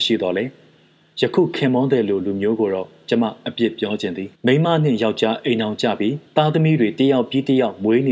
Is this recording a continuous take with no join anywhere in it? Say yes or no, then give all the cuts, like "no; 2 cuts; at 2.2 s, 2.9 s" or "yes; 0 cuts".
no; 2 cuts; at 4.3 s, 6.3 s